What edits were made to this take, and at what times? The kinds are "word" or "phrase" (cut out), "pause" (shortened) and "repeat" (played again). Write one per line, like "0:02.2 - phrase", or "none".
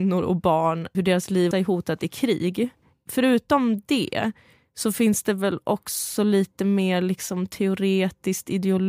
0:00.9 - word
0:01.5 - phrase